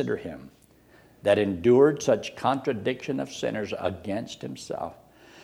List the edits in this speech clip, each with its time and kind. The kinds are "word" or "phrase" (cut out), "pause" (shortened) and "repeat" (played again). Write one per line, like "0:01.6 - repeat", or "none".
none